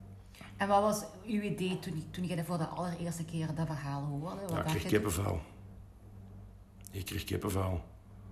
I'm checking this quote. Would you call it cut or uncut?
uncut